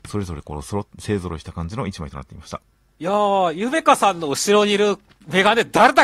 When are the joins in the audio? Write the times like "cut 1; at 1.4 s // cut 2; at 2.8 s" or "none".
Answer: none